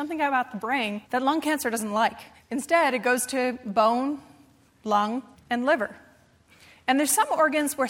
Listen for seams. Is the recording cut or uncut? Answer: cut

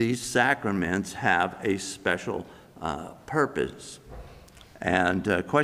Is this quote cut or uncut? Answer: uncut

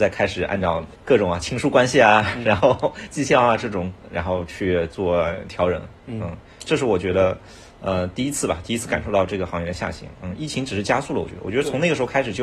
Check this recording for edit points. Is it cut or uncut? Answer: uncut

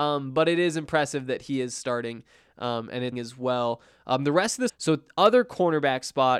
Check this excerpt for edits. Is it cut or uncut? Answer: cut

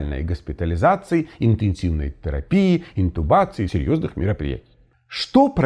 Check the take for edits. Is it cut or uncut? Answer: cut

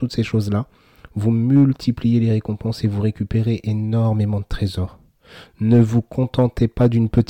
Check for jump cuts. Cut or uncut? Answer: uncut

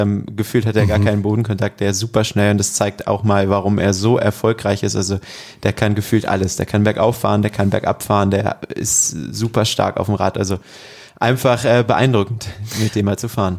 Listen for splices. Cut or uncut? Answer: uncut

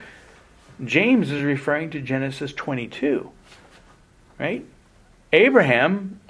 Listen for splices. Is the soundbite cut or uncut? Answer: uncut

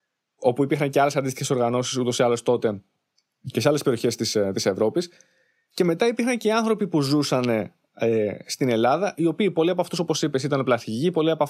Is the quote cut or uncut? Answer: uncut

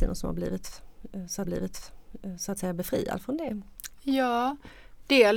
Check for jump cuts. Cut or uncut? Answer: cut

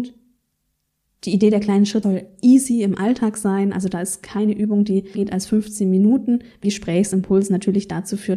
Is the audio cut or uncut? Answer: cut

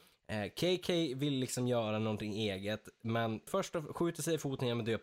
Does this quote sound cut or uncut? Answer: cut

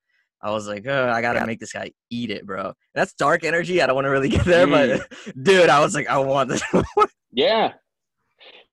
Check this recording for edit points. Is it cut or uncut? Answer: uncut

